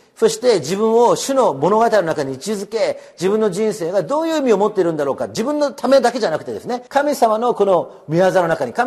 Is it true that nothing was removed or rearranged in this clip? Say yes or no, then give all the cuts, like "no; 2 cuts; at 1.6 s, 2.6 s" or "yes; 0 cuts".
no; 1 cut; at 6.9 s